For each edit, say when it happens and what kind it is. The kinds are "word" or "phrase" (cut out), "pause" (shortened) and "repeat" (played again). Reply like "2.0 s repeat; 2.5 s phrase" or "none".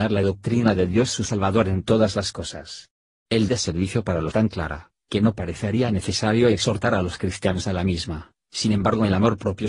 3.5 s word; 4.3 s phrase